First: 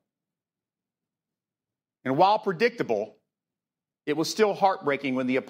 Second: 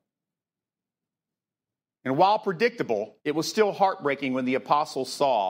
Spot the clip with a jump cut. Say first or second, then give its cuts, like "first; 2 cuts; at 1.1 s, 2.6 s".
second; 1 cut; at 3.2 s